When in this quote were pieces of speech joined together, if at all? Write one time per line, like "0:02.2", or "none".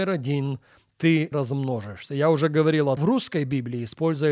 0:01.3
0:03.0